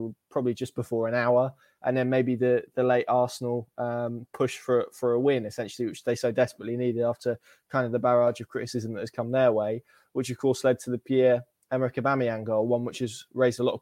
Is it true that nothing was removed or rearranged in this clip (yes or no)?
yes